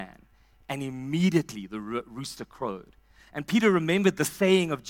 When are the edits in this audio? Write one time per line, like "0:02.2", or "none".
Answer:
none